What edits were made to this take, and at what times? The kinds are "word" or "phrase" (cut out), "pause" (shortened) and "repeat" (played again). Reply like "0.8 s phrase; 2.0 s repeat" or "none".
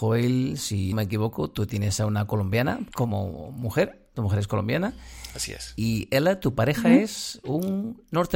0.9 s word; 2.9 s word